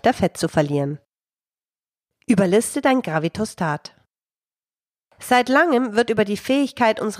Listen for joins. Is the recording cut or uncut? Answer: uncut